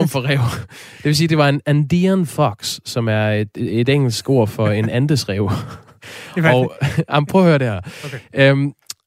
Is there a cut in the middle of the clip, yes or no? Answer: no